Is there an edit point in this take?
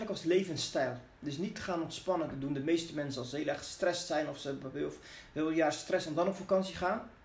no; 0 cuts

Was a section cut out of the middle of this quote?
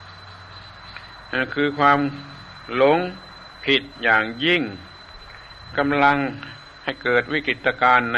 yes; 2 cuts; at 3.5 s, 3.9 s

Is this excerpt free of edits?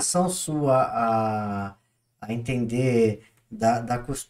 yes; 0 cuts

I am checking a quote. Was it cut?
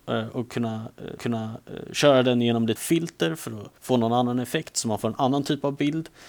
yes; 3 cuts; at 1.2 s, 2.8 s, 3.8 s

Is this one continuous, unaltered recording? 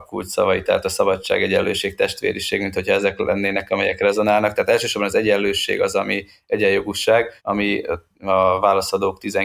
no; 1 cut; at 7.4 s

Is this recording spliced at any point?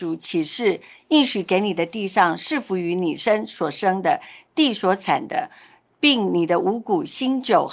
no; 0 cuts

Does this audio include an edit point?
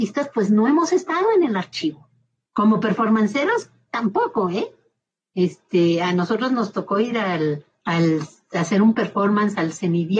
no; 0 cuts

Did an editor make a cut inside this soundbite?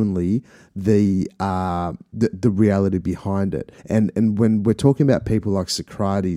yes; 1 cut; at 3.8 s

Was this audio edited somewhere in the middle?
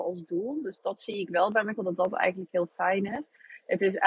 yes; 1 cut; at 1.8 s

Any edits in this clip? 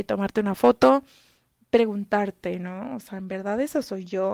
no; 0 cuts

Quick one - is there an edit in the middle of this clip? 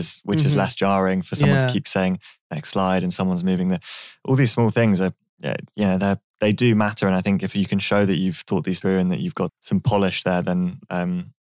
yes; 2 cuts; at 8.8 s, 9.5 s

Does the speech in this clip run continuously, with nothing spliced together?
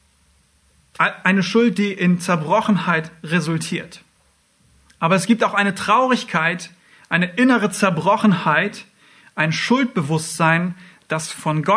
no; 1 cut; at 4.4 s

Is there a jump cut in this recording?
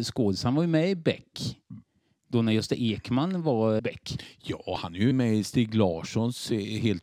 yes; 2 cuts; at 3.8 s, 5.1 s

